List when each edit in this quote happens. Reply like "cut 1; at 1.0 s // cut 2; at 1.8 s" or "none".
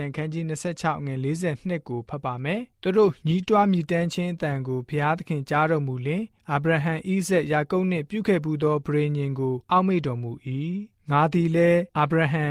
cut 1; at 2.7 s // cut 2; at 10.9 s